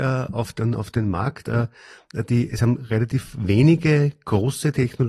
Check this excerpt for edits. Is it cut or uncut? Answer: uncut